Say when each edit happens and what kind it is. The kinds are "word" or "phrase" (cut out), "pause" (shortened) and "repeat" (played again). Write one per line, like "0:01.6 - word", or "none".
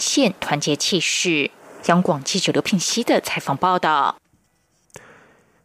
none